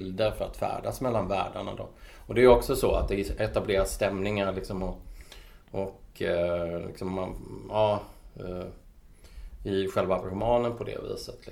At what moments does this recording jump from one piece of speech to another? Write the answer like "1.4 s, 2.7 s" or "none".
none